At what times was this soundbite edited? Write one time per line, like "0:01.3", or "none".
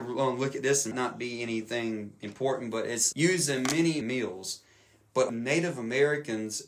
0:00.9
0:03.1
0:04.0
0:05.3